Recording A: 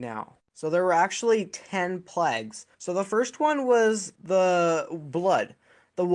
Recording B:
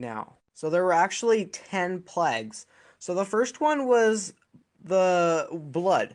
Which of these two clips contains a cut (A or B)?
A